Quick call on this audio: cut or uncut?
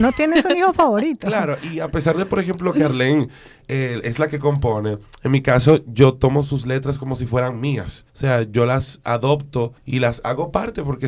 cut